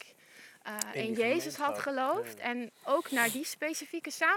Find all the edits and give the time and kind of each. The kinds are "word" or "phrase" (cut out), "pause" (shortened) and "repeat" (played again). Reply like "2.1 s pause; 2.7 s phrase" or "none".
none